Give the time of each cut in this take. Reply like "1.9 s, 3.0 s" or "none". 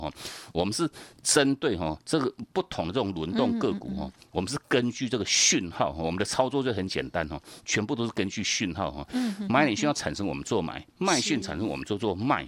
10.9 s